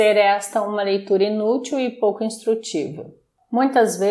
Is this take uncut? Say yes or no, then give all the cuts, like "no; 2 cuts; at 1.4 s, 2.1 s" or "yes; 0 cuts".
yes; 0 cuts